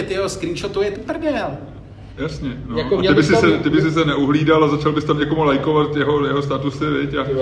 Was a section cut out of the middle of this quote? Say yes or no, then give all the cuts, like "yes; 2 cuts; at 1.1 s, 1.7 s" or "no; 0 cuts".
yes; 1 cut; at 1.0 s